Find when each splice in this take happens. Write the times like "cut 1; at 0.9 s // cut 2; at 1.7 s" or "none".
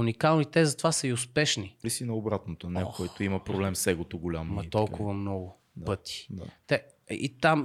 cut 1; at 1.8 s

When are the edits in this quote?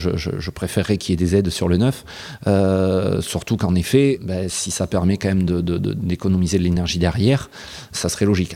none

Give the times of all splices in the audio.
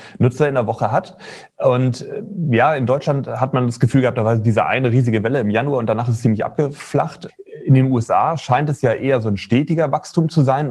none

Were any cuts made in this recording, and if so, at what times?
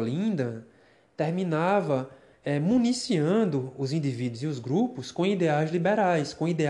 none

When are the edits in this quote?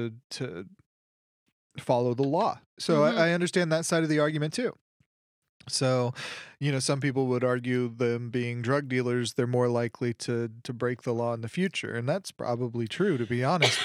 none

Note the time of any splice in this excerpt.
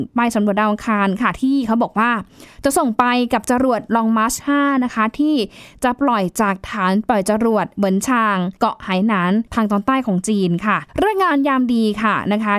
cut 1; at 8.6 s // cut 2; at 9.5 s // cut 3; at 10.9 s

